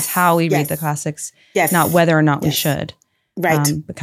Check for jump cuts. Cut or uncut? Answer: uncut